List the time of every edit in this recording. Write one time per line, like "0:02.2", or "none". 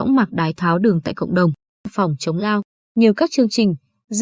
none